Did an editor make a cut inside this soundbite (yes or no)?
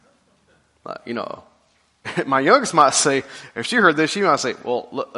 no